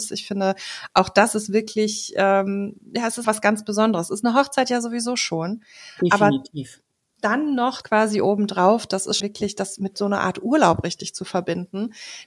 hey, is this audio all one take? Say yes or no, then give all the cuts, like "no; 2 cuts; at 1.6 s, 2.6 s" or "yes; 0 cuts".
no; 3 cuts; at 3.2 s, 7.8 s, 9.2 s